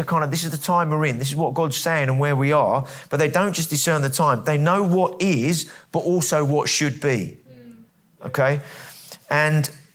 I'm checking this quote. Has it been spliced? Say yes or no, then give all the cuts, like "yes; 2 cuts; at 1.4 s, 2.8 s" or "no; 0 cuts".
yes; 1 cut; at 7.9 s